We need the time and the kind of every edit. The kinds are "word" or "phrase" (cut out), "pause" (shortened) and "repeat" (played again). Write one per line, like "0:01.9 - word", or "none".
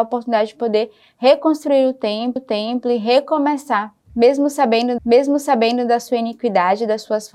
0:02.4 - repeat
0:05.0 - repeat